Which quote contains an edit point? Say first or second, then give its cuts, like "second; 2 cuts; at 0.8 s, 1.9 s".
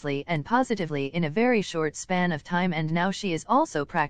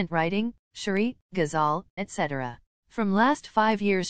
second; 2 cuts; at 1.2 s, 2.0 s